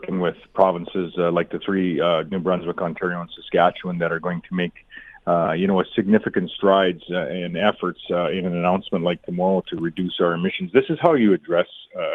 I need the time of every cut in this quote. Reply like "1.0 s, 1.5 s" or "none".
none